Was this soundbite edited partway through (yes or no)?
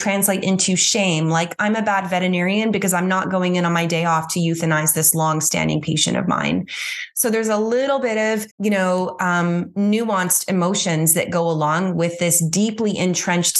yes